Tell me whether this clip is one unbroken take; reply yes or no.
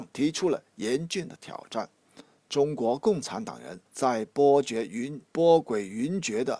no